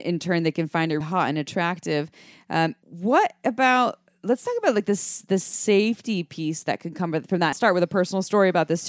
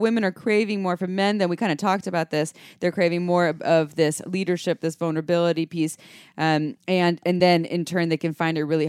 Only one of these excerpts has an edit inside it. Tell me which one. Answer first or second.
first